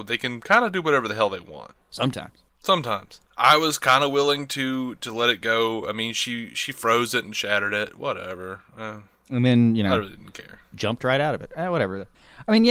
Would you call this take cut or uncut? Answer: cut